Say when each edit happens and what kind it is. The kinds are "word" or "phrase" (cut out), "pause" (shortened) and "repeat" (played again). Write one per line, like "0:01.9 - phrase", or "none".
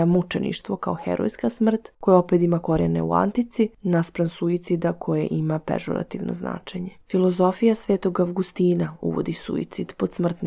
0:01.9 - pause
0:07.0 - pause